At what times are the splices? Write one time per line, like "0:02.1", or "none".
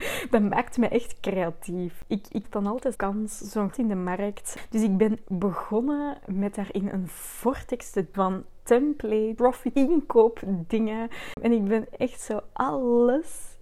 0:02.4
0:02.9
0:03.7
0:05.2
0:08.1
0:09.7